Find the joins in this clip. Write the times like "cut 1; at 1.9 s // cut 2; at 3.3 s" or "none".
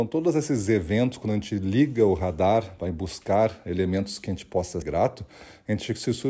cut 1; at 4.8 s